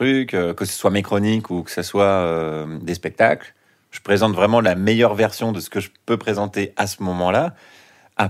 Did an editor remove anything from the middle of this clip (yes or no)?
no